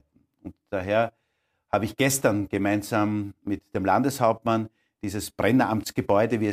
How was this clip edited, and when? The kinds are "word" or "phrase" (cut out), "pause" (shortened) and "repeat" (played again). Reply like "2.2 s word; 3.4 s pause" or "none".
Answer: none